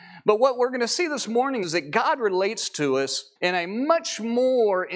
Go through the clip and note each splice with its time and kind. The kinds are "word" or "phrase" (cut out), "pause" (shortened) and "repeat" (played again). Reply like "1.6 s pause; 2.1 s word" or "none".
1.6 s word; 3.4 s pause

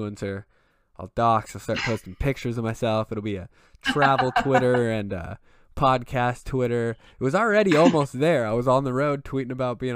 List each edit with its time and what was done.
none

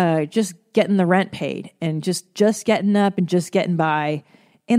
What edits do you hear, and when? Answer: none

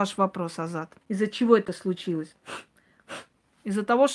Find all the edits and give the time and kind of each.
1.0 s pause

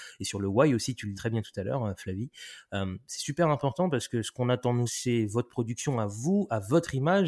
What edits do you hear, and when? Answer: 1.1 s word; 4.9 s word

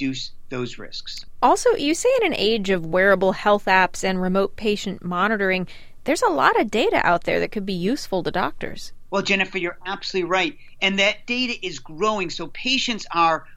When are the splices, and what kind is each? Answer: none

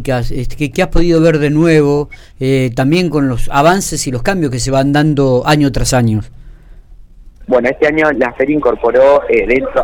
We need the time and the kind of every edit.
none

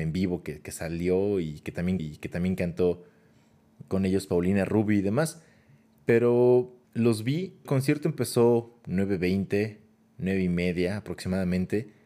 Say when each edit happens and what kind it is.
2.0 s repeat; 6.8 s pause; 7.7 s phrase

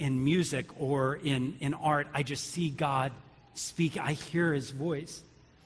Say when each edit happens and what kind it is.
none

